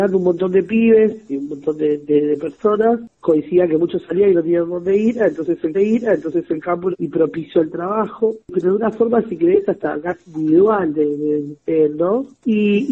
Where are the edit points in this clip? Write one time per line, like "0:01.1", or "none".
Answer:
0:03.1
0:05.7
0:06.9
0:08.4